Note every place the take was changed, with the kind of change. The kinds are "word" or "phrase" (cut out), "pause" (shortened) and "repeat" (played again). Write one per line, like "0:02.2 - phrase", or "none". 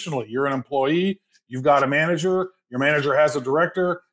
none

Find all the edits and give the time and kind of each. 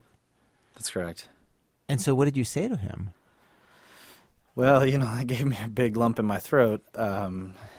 none

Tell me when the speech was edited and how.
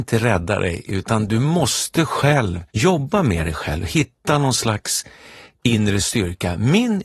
0:02.7 - pause

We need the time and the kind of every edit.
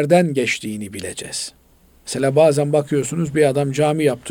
none

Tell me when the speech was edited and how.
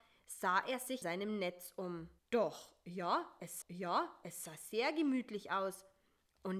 0:01.0 - word
0:02.2 - pause
0:03.6 - repeat

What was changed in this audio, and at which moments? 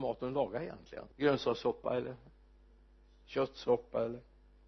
0:01.1 - pause

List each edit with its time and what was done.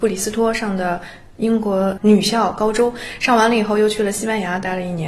0:02.0 - word

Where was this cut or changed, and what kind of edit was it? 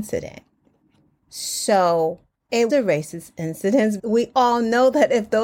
0:02.7 - word
0:04.0 - word

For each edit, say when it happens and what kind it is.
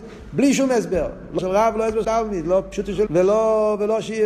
0:01.4 - word
0:02.0 - word
0:03.1 - word

